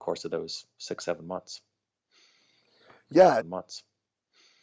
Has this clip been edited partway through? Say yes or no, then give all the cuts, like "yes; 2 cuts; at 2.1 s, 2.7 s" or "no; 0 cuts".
yes; 1 cut; at 3.4 s